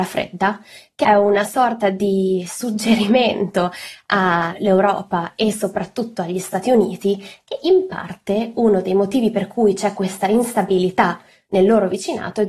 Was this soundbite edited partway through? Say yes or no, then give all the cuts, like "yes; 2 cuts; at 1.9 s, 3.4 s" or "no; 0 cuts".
no; 0 cuts